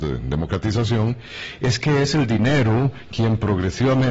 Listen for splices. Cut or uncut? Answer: uncut